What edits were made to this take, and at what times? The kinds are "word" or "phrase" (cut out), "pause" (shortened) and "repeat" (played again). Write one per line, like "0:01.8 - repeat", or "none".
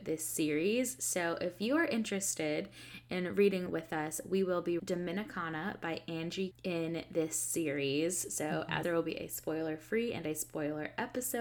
0:03.7 - word
0:04.8 - word
0:06.5 - word
0:08.8 - word